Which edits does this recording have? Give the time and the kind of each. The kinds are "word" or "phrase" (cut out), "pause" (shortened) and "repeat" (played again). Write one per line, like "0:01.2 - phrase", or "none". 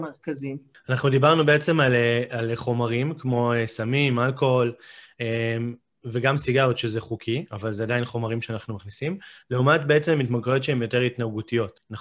none